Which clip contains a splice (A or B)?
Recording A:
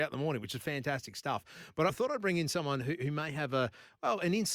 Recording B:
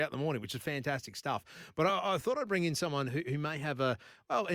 A